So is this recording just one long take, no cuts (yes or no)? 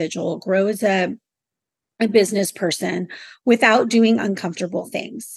yes